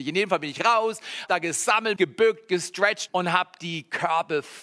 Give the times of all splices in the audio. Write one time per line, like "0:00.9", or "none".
0:01.3
0:02.0
0:03.1